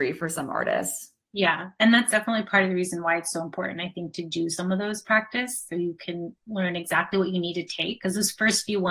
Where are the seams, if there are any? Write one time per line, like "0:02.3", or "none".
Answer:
none